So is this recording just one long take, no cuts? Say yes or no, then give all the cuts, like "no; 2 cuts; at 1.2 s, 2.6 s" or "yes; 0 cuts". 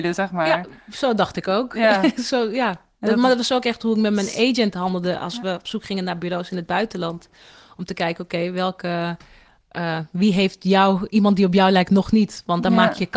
yes; 0 cuts